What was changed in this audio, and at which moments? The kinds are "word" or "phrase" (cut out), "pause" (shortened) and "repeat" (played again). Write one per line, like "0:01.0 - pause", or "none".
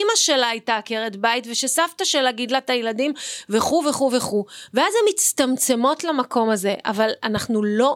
none

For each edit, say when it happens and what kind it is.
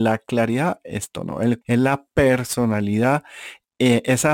0:01.1 - word
0:01.6 - word

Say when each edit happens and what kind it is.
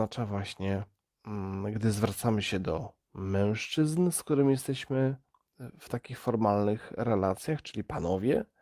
0:03.0 - pause

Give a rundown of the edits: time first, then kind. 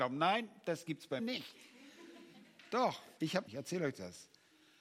0:01.2 - word
0:03.2 - pause
0:03.5 - phrase

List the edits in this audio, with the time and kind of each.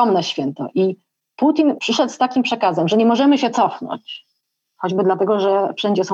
none

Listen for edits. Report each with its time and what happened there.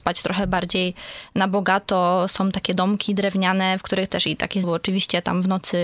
0:04.6 - word

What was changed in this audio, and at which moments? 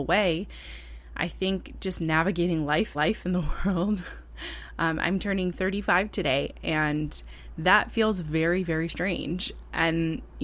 0:02.9 - repeat

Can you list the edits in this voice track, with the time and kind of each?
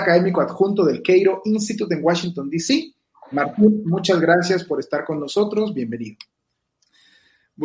none

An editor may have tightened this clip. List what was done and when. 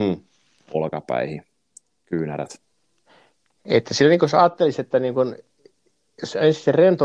none

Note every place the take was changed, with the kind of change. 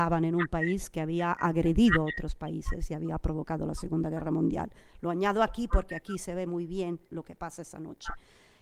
none

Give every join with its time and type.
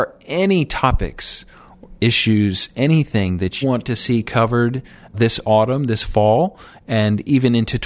0:03.6 - word
0:05.1 - word

